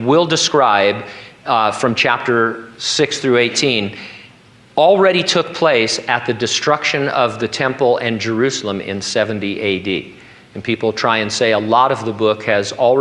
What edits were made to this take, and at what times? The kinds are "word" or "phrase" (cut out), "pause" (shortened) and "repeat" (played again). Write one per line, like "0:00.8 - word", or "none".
none